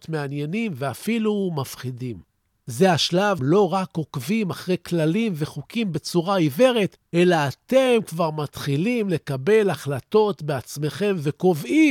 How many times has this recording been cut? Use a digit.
1